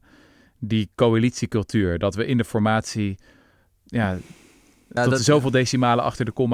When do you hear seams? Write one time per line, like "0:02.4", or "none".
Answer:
0:05.0